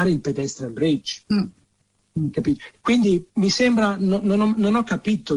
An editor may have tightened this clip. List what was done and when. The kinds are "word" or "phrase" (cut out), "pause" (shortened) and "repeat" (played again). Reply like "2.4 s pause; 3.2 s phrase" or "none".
3.3 s pause